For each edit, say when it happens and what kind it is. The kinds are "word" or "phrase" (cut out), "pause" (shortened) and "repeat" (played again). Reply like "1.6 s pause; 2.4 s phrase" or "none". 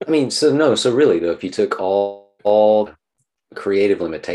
2.4 s pause